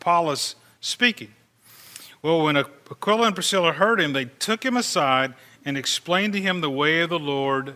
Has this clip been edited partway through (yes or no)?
no